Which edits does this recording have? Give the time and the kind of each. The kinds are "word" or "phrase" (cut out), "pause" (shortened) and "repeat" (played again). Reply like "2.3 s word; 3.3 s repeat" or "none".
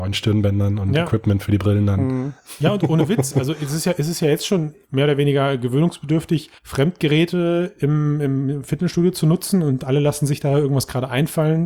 4.8 s pause; 6.6 s pause